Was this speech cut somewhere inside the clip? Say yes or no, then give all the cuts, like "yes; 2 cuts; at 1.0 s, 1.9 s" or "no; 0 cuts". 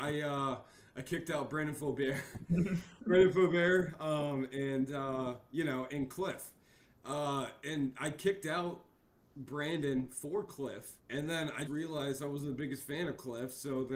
yes; 3 cuts; at 5.9 s, 11.0 s, 11.7 s